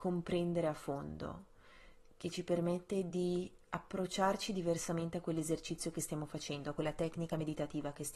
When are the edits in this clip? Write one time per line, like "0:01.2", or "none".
none